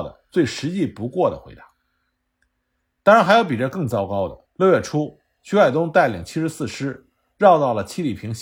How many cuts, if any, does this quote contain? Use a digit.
1